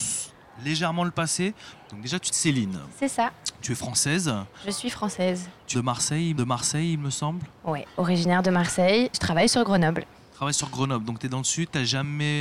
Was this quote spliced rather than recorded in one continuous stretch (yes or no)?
yes